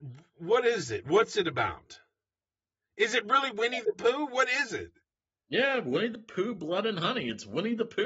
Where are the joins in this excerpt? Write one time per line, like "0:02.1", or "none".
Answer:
none